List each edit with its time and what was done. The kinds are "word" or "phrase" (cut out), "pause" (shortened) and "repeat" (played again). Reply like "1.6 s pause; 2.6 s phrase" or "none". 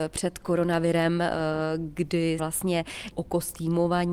2.4 s word; 3.1 s phrase

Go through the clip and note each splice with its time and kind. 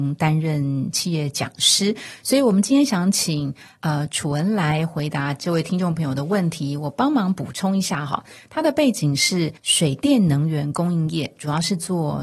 9.6 s pause

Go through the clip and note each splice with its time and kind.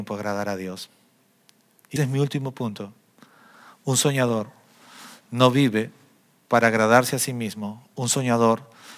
2.0 s word

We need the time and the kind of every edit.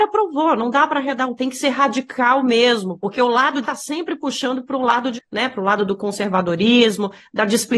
1.4 s word; 3.6 s phrase; 5.2 s word

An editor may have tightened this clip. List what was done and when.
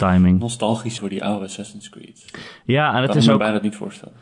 1.0 s word

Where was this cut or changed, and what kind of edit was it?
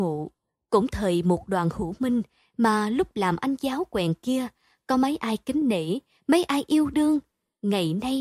none

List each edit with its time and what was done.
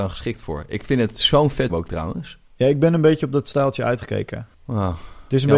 1.7 s word; 4.5 s pause

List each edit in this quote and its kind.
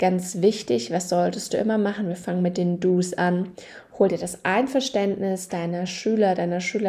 none

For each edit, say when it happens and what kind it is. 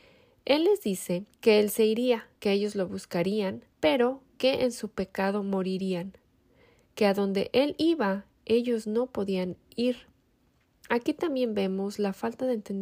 1.3 s pause; 2.4 s pause; 3.7 s pause

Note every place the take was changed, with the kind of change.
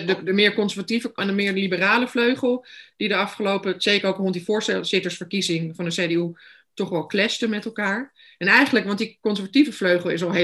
1.2 s word

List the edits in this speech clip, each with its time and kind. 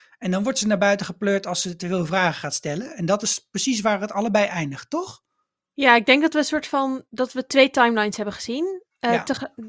none

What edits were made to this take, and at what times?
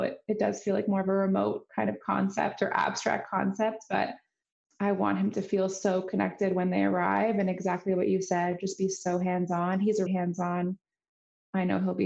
10.1 s word

